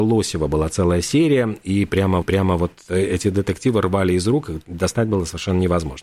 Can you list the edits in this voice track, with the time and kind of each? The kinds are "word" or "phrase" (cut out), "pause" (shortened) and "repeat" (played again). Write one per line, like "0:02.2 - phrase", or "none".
0:02.2 - repeat